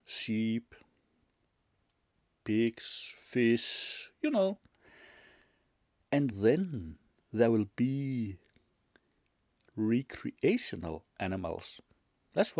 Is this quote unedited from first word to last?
yes; 0 cuts

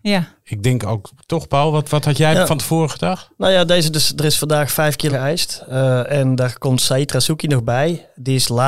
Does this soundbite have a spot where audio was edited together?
yes; 1 cut; at 5.1 s

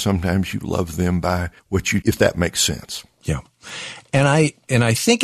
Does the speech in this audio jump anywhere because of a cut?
yes; 2 cuts; at 1.6 s, 2.0 s

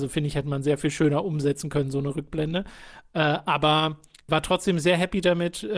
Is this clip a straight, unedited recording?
no; 1 cut; at 4.3 s

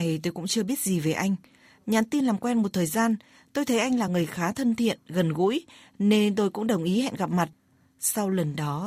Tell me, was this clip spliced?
no; 0 cuts

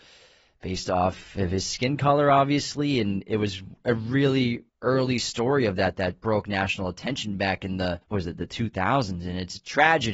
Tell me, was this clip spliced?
yes; 2 cuts; at 4.7 s, 8.0 s

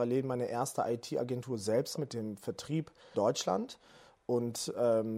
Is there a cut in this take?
yes; 2 cuts; at 2.0 s, 3.1 s

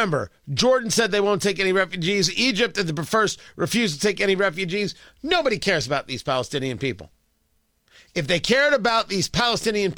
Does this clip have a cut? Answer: no; 0 cuts

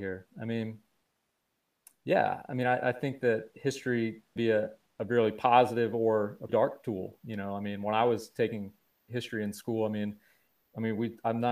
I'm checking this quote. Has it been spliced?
yes; 3 cuts; at 4.4 s, 4.9 s, 6.5 s

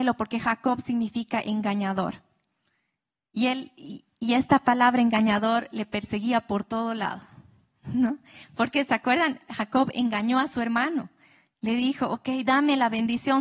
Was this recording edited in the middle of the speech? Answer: no; 0 cuts

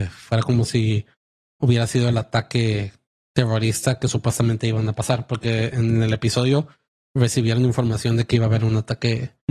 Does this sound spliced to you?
no; 0 cuts

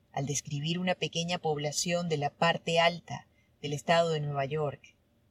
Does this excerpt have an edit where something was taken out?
no; 0 cuts

